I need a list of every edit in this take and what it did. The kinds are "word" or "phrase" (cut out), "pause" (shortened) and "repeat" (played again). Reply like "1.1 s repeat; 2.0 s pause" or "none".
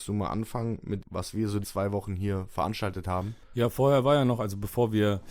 1.0 s word; 1.6 s word